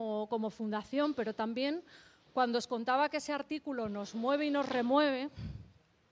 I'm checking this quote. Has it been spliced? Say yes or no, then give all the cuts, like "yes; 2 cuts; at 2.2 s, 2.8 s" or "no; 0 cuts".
no; 0 cuts